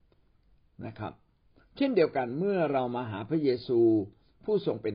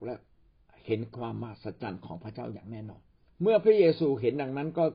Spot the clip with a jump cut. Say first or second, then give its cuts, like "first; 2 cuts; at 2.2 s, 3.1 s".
second; 1 cut; at 3.3 s